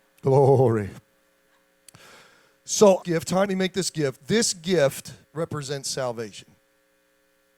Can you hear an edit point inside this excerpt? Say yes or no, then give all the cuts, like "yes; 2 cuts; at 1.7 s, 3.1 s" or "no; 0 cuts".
yes; 3 cuts; at 3.0 s, 3.5 s, 5.2 s